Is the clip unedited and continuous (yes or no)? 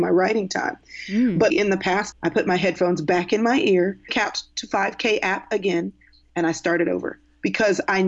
no